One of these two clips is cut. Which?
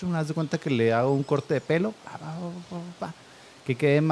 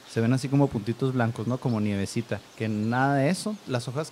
second; 1 cut; at 2.5 s

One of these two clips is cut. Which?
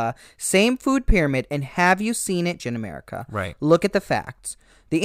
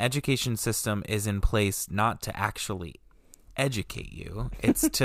first; 1 cut; at 2.6 s

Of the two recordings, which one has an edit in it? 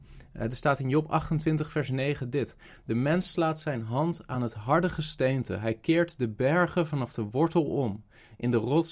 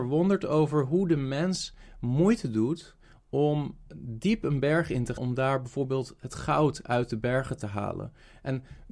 second; 1 cut; at 5.2 s

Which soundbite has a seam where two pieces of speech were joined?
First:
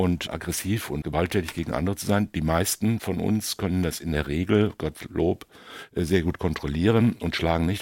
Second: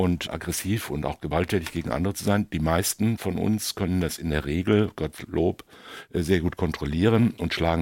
first; 1 cut; at 1.0 s

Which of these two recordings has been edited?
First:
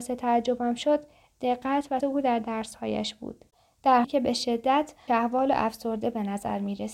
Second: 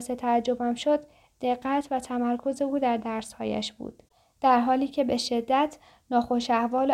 first; 3 cuts; at 2.0 s, 4.0 s, 5.1 s

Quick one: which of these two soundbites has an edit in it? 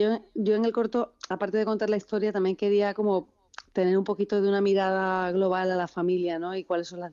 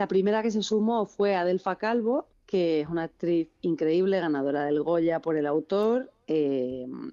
second; 1 cut; at 2.3 s

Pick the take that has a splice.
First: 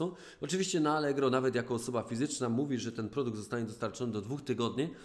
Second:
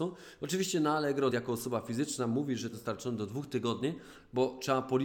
second; 2 cuts; at 1.3 s, 2.7 s

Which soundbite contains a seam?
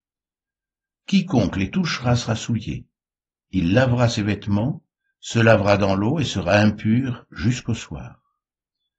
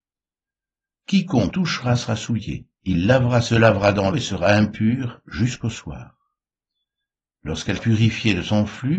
second; 5 cuts; at 1.5 s, 2.8 s, 3.5 s, 4.1 s, 7.8 s

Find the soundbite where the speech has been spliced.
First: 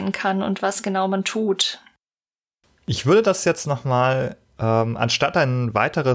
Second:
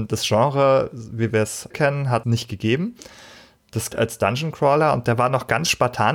second; 3 cuts; at 1.7 s, 2.2 s, 3.9 s

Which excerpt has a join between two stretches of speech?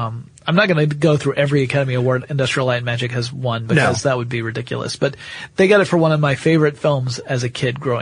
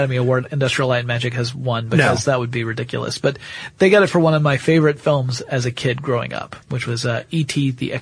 second; 1 cut; at 6.6 s

